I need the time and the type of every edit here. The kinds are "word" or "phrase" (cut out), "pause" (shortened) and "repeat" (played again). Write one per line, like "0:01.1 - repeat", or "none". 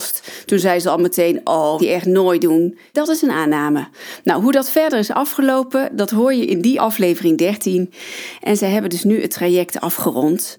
0:01.8 - phrase
0:02.9 - word
0:06.8 - word